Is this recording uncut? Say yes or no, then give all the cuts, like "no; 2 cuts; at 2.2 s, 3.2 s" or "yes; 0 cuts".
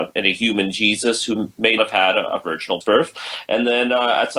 no; 2 cuts; at 1.8 s, 2.8 s